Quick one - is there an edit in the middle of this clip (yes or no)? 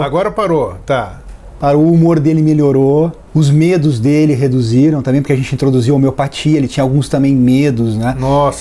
yes